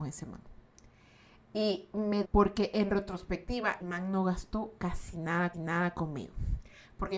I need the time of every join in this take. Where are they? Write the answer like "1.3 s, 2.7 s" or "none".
2.2 s, 3.8 s, 5.5 s